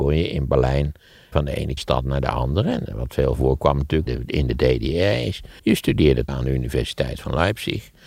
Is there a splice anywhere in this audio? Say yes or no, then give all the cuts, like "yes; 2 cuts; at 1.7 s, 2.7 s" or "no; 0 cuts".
yes; 5 cuts; at 1.3 s, 1.8 s, 4.1 s, 5.6 s, 6.3 s